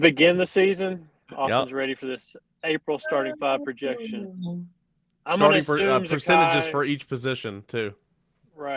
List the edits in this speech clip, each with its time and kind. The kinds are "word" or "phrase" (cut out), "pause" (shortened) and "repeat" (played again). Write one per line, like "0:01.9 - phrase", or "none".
none